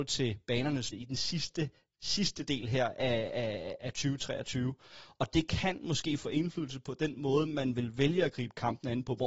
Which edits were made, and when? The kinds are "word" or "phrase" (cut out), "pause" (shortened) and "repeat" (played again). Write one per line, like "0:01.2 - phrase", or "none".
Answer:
0:00.9 - word
0:03.8 - word